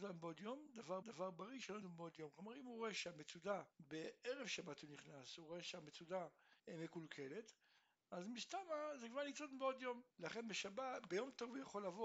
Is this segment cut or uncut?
cut